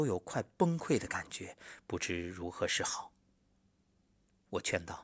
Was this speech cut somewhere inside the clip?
no; 0 cuts

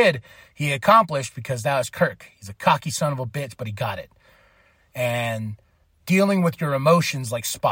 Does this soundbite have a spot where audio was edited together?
no; 0 cuts

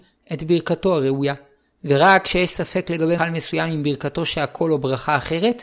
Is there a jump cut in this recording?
yes; 1 cut; at 3.2 s

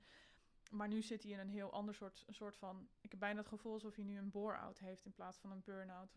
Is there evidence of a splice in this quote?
yes; 1 cut; at 2.9 s

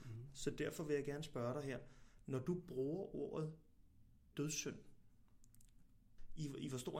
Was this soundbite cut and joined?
no; 0 cuts

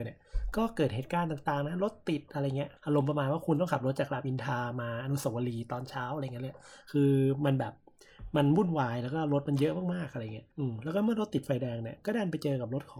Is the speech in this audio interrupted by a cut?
yes; 2 cuts; at 2.8 s, 10.5 s

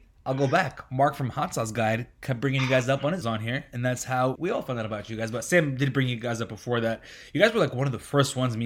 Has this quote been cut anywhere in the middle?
yes; 2 cuts; at 3.2 s, 4.4 s

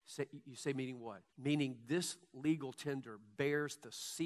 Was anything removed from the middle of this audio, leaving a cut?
yes; 1 cut; at 1.3 s

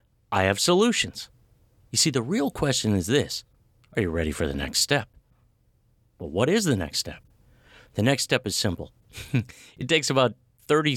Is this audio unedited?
yes; 0 cuts

